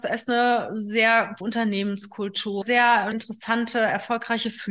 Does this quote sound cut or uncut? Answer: cut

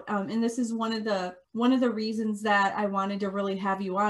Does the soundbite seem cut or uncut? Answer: cut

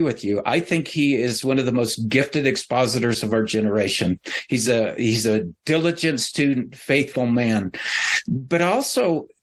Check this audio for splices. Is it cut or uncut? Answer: uncut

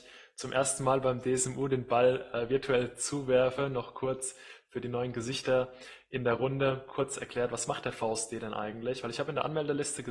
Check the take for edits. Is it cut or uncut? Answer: uncut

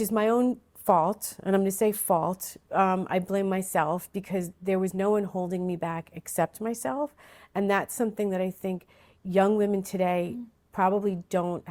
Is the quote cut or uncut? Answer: uncut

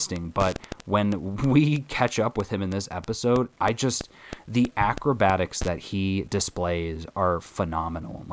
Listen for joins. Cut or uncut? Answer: uncut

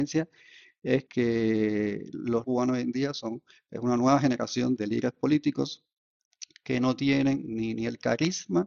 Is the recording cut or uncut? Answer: cut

